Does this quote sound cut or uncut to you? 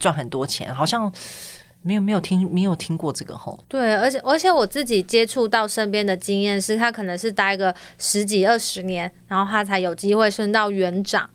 cut